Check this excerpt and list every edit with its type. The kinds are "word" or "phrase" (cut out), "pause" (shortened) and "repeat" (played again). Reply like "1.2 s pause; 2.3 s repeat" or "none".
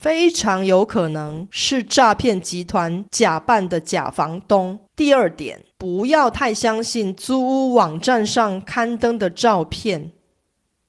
3.1 s pause; 4.9 s pause; 5.7 s pause